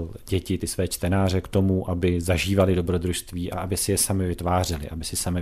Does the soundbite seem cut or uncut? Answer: uncut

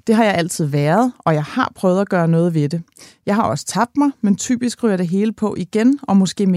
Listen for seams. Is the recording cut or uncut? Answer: uncut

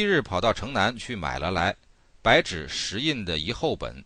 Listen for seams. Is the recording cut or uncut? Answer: uncut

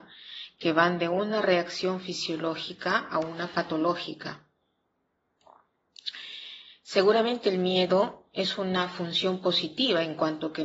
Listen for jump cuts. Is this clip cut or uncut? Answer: uncut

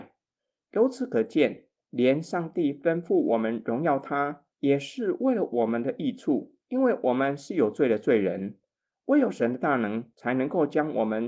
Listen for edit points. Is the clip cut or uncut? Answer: cut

